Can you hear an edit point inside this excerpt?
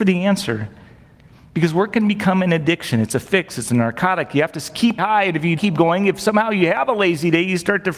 yes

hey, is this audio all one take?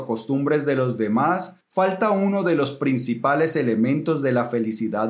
no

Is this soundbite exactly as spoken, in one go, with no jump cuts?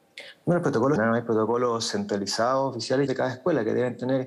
no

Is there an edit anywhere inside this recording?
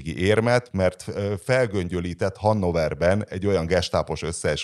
no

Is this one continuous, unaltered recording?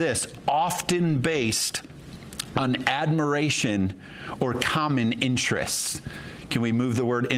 yes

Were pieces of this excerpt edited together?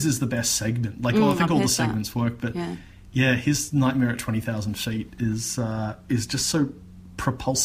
no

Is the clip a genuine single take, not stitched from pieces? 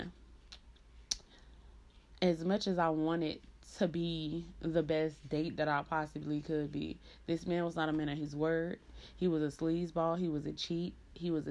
yes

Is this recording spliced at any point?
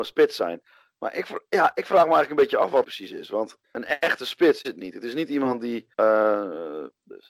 yes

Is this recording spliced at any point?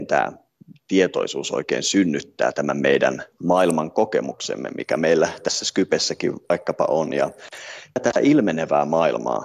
no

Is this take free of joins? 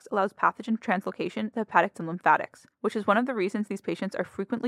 no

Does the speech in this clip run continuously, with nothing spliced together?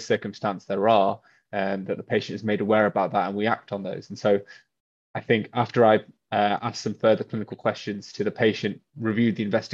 yes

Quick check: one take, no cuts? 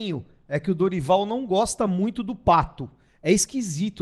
yes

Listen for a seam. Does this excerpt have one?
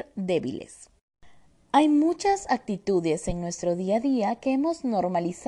no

